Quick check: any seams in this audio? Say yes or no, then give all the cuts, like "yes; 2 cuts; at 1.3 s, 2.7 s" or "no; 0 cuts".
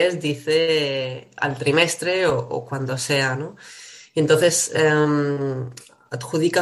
no; 0 cuts